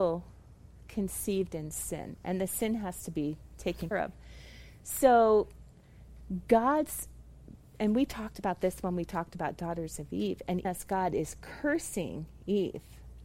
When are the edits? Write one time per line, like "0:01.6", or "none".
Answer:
0:03.9
0:10.6